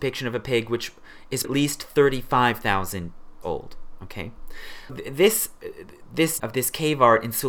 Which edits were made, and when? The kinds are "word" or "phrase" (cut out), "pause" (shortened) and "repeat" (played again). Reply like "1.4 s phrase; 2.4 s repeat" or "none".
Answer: 1.4 s word; 3.4 s word; 4.9 s word; 6.4 s word